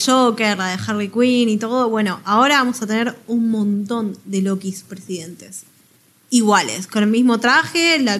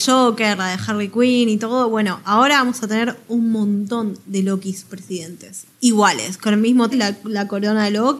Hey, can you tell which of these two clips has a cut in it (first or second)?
second